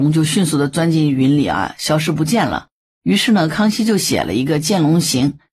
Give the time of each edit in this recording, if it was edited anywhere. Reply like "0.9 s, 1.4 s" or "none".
none